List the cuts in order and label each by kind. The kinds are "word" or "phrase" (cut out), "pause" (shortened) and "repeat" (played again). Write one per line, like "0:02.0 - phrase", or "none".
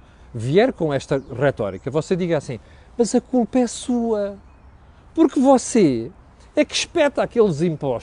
none

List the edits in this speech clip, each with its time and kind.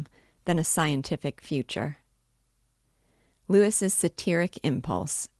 none

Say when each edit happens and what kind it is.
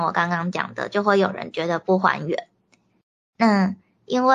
none

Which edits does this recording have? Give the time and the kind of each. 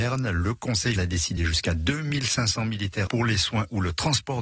0:01.0 - word
0:01.4 - word
0:03.1 - phrase

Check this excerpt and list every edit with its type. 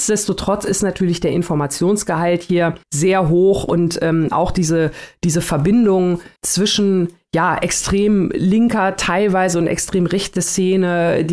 0:02.8 - pause
0:06.4 - pause

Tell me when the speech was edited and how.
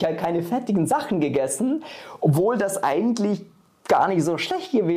none

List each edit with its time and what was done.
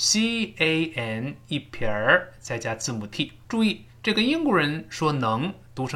0:03.4 - pause
0:03.9 - pause

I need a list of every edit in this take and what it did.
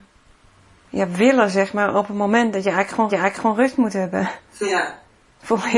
0:03.1 - repeat
0:04.5 - pause

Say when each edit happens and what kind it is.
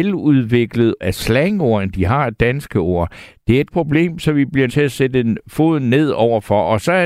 0:01.0 - word
0:03.7 - word
0:04.7 - word

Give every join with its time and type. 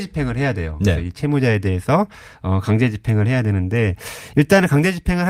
none

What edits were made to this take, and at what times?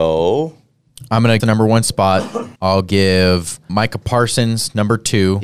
0:01.4 - phrase
0:02.6 - pause
0:03.7 - word

